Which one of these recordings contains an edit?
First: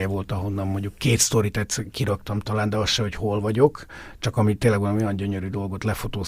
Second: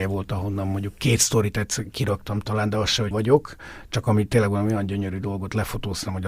second; 1 cut; at 3.1 s

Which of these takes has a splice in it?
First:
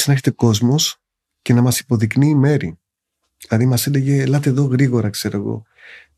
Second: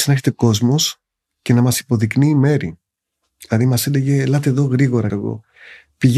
second; 1 cut; at 5.1 s

